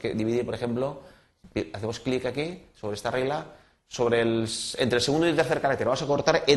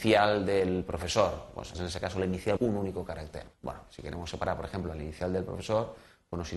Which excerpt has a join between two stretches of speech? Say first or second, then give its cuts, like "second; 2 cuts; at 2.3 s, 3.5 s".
second; 3 cuts; at 1.7 s, 2.6 s, 3.5 s